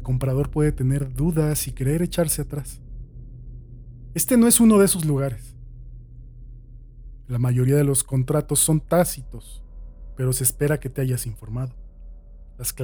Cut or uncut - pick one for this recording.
uncut